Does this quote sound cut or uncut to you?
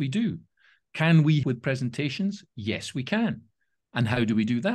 cut